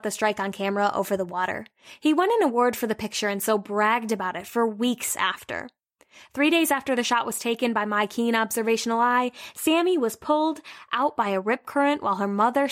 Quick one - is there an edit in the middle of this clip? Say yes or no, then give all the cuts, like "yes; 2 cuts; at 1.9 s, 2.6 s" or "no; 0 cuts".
no; 0 cuts